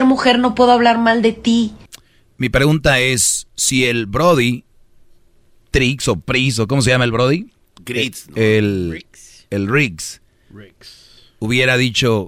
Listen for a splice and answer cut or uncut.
uncut